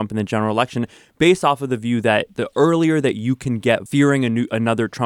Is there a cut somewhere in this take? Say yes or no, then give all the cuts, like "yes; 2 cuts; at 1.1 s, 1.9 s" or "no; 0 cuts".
yes; 1 cut; at 3.9 s